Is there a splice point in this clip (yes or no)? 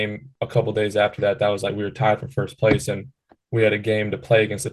no